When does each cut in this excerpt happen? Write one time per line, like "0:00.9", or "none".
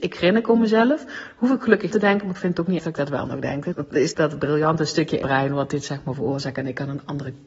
0:01.9
0:02.8
0:03.7
0:04.1
0:05.2

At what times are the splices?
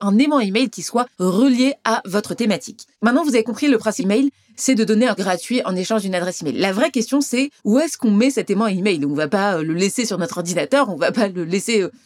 0:01.1
0:02.9
0:04.0
0:05.2
0:07.6

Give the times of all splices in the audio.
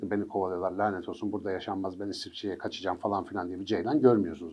none

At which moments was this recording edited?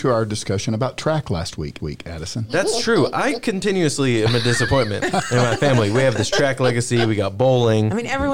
0:01.8

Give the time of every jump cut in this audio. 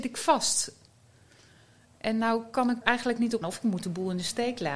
0:02.8
0:03.4

